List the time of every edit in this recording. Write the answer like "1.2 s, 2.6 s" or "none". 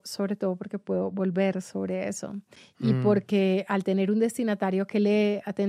none